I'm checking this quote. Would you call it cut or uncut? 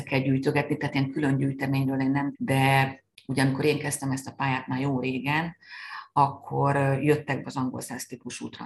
cut